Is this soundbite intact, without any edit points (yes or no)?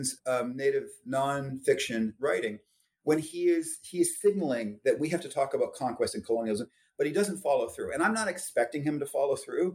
yes